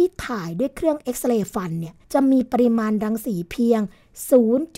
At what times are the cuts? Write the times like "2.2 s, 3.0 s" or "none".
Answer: 2.0 s